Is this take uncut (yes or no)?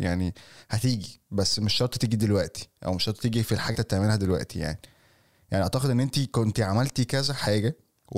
no